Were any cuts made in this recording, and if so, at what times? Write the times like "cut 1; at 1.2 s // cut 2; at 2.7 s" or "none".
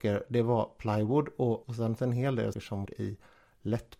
cut 1; at 1.6 s // cut 2; at 2.0 s // cut 3; at 2.5 s // cut 4; at 2.9 s

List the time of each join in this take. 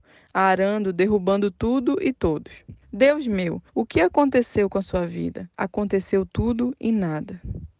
cut 1; at 2.8 s // cut 2; at 3.7 s // cut 3; at 5.5 s

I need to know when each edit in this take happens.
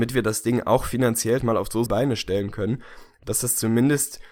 cut 1; at 1.4 s // cut 2; at 1.9 s

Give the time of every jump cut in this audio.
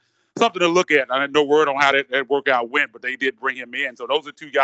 none

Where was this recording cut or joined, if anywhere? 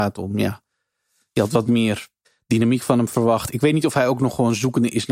cut 1; at 2.2 s

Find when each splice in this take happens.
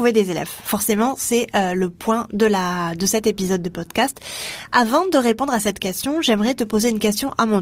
none

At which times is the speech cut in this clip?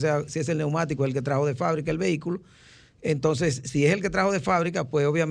none

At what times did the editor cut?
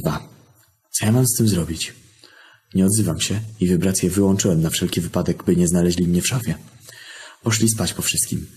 none

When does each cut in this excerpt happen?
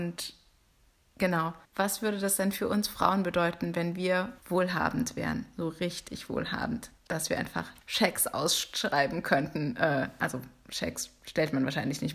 cut 1; at 1.7 s // cut 2; at 4.4 s // cut 3; at 7.0 s // cut 4; at 7.8 s

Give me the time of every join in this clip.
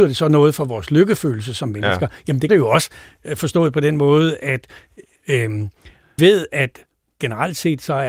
cut 1; at 2.5 s // cut 2; at 6.2 s

